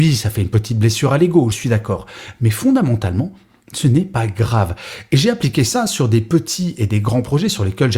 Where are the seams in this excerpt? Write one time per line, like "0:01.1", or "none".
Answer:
0:01.5